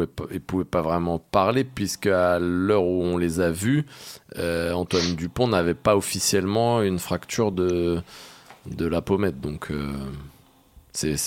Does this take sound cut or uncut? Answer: uncut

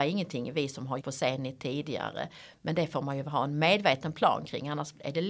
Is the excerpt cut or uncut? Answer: cut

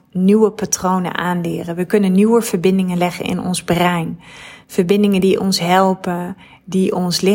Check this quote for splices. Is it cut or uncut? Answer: uncut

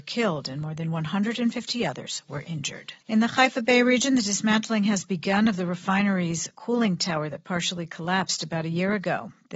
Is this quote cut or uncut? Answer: cut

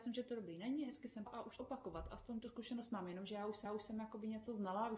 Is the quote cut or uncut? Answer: cut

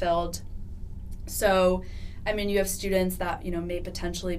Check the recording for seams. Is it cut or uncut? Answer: uncut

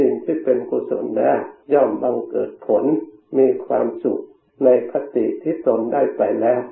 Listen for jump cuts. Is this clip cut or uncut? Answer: cut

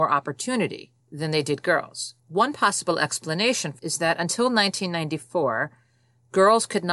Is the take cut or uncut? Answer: cut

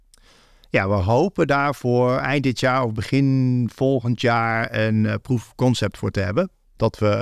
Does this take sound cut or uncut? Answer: uncut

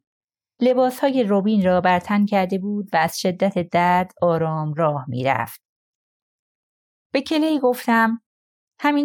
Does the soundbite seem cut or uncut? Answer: uncut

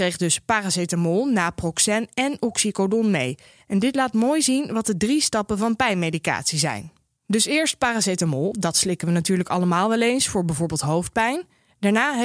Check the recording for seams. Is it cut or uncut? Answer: uncut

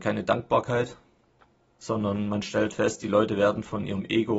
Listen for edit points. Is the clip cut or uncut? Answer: cut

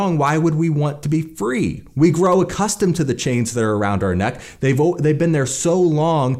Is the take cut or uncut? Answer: uncut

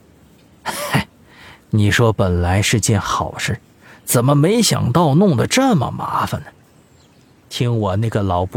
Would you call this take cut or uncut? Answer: uncut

